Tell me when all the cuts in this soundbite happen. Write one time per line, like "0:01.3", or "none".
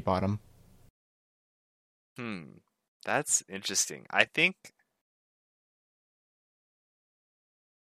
none

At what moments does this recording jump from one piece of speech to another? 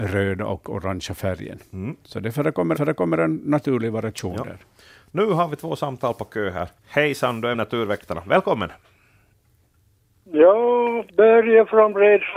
0:02.8
0:06.8
0:07.5
0:11.1

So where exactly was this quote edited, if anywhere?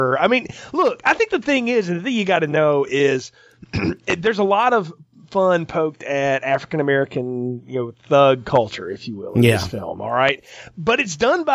none

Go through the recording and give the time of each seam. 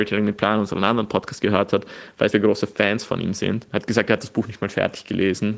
0:02.3

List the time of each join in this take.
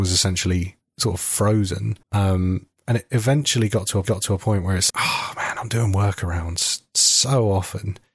0:02.0
0:04.0
0:04.9

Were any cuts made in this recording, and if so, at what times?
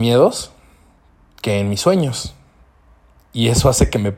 none

